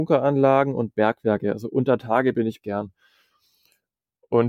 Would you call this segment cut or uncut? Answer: cut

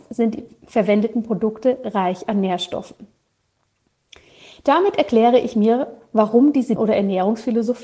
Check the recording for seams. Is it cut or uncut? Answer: cut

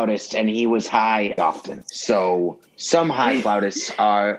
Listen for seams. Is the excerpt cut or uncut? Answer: cut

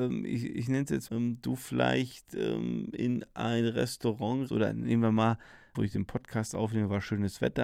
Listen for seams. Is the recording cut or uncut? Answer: cut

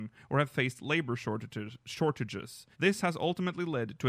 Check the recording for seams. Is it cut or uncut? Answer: cut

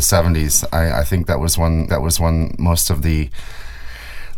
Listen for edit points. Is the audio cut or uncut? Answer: cut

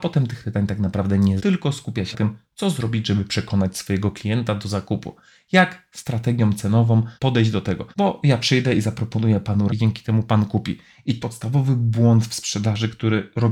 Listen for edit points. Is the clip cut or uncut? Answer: cut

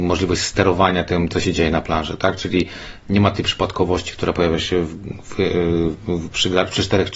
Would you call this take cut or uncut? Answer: uncut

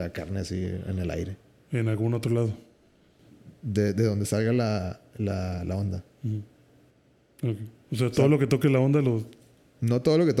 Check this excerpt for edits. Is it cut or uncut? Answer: uncut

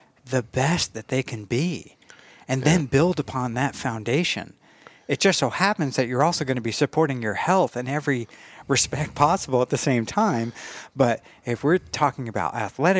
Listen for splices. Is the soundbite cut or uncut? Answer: uncut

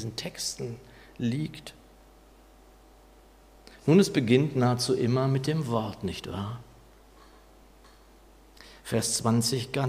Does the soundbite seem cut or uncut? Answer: uncut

